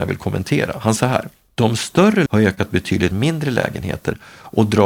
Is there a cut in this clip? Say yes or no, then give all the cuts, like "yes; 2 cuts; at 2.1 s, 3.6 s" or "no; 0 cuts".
yes; 3 cuts; at 1.0 s, 2.3 s, 3.1 s